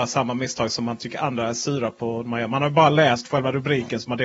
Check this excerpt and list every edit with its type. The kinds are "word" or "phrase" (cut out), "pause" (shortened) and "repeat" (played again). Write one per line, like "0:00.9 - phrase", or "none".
none